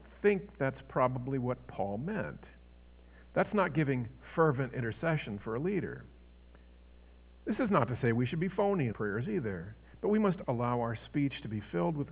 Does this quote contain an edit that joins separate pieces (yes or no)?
yes